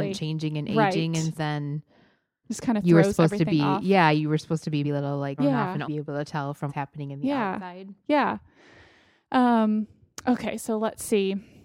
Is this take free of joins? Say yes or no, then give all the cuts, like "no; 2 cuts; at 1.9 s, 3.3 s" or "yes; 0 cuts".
no; 6 cuts; at 1.3 s, 2.4 s, 4.8 s, 5.4 s, 5.8 s, 6.7 s